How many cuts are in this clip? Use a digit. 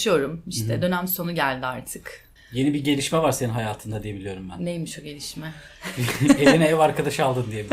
1